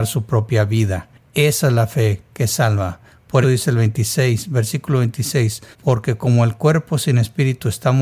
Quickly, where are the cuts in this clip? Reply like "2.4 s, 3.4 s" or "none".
3.4 s, 5.7 s